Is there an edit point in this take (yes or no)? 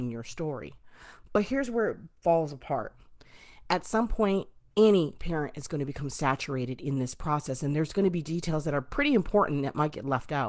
no